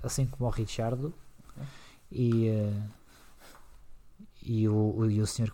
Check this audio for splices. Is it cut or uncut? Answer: uncut